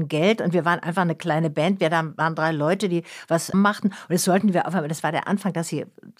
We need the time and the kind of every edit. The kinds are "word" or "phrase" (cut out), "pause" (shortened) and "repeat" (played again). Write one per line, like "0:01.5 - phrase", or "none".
0:03.5 - phrase